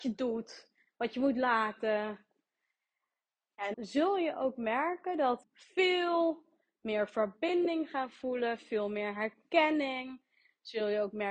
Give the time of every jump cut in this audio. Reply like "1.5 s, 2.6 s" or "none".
3.7 s, 5.4 s

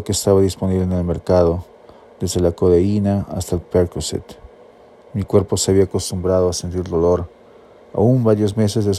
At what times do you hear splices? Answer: none

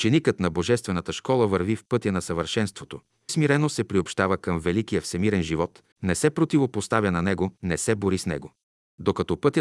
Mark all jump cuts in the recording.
3.3 s, 5.9 s, 7.6 s

